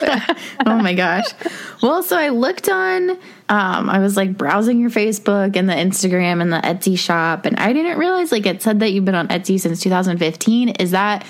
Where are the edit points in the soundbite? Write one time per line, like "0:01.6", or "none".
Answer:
0:03.4